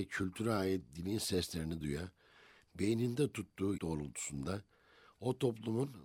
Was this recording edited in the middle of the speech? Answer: yes; 2 cuts; at 1.8 s, 3.8 s

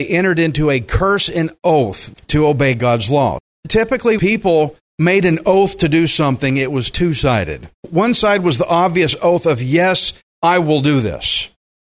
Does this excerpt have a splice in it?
yes; 1 cut; at 4.2 s

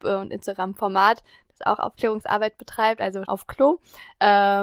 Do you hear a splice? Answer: yes; 1 cut; at 3.2 s

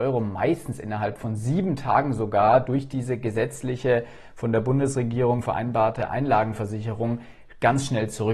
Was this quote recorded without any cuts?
yes; 0 cuts

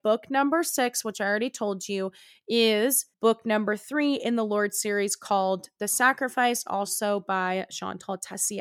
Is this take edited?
yes; 1 cut; at 3.1 s

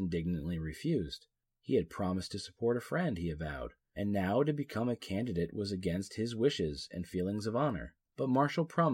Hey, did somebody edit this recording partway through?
no; 0 cuts

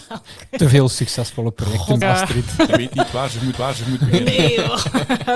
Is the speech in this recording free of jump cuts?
no; 3 cuts; at 2.0 s, 2.7 s, 3.5 s

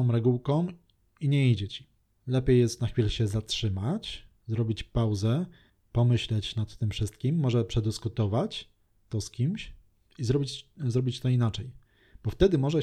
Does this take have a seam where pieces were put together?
yes; 1 cut; at 4.4 s

